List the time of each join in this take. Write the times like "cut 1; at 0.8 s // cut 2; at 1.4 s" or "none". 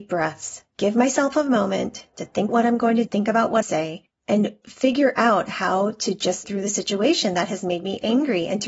cut 1; at 2.5 s // cut 2; at 3.1 s // cut 3; at 3.6 s // cut 4; at 6.4 s